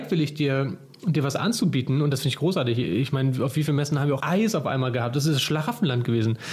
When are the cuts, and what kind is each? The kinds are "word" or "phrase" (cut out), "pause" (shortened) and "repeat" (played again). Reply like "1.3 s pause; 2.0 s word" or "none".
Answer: 4.2 s word